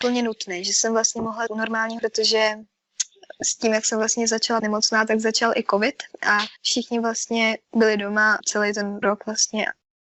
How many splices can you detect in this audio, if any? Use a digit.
7